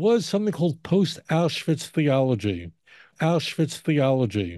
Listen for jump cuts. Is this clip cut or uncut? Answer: cut